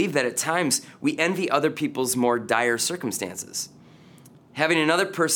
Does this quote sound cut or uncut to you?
uncut